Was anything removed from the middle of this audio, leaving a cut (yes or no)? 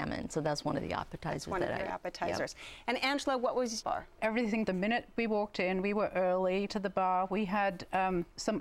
yes